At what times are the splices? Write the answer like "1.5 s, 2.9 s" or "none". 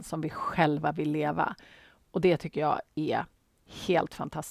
none